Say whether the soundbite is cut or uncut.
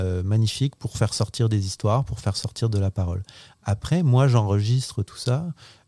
uncut